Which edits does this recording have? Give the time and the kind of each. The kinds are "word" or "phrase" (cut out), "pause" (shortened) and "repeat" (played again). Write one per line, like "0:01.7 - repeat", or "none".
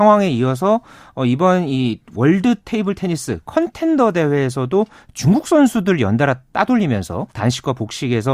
0:02.0 - pause
0:07.3 - pause